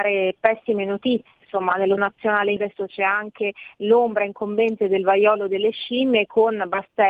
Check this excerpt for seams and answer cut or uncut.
cut